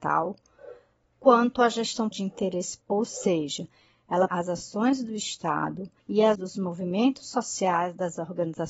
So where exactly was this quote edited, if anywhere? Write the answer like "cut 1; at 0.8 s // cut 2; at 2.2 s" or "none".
cut 1; at 2.1 s // cut 2; at 2.8 s // cut 3; at 4.3 s // cut 4; at 6.0 s // cut 5; at 6.4 s